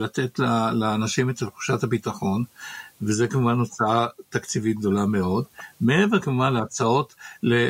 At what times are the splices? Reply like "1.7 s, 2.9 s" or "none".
none